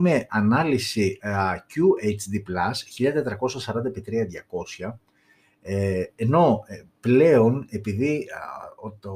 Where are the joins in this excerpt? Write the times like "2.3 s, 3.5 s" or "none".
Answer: none